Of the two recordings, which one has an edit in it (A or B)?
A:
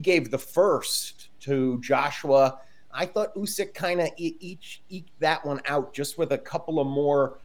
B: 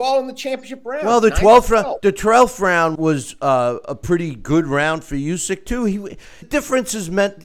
B